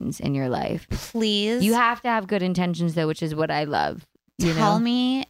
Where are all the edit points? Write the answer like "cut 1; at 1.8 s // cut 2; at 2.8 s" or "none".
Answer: none